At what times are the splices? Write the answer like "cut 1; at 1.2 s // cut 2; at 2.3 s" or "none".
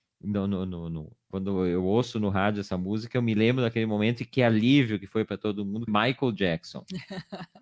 cut 1; at 5.9 s